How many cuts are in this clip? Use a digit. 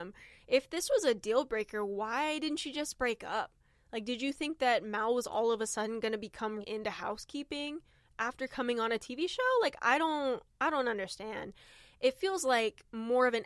1